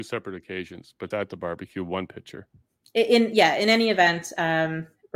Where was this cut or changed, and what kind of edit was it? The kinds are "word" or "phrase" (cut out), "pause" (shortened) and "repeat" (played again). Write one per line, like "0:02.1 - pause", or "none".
0:01.1 - word